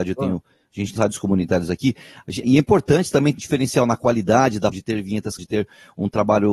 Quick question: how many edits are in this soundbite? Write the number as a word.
five